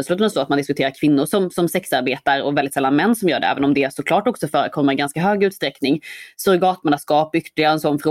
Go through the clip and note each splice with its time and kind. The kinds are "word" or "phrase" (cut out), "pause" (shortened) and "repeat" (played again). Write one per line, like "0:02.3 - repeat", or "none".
none